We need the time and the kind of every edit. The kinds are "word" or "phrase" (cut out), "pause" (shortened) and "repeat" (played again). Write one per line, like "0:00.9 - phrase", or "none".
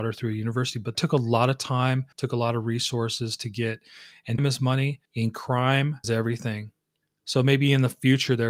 0:00.9 - word
0:02.1 - pause
0:04.4 - word
0:05.1 - pause
0:06.0 - phrase
0:07.0 - pause